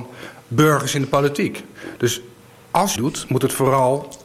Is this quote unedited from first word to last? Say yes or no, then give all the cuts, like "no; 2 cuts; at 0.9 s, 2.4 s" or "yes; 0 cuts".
no; 1 cut; at 3.0 s